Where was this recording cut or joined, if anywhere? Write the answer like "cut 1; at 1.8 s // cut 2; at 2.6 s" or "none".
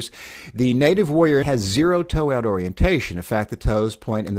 cut 1; at 1.4 s